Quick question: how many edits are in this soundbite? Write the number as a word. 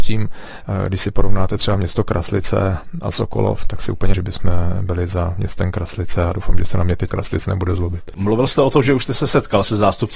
two